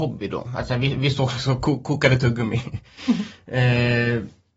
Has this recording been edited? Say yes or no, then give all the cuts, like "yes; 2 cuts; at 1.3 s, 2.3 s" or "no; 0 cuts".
no; 0 cuts